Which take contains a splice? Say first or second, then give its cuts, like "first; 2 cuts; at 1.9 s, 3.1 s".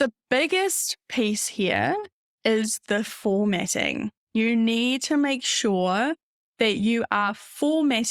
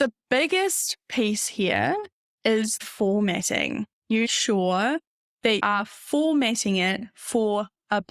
second; 3 cuts; at 2.8 s, 4.2 s, 5.6 s